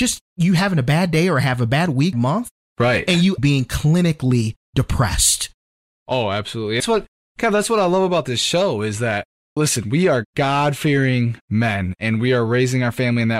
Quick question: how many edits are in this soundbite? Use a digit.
4